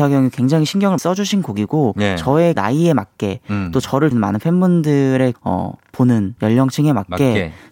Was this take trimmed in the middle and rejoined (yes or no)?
yes